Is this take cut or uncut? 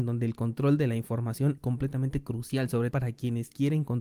cut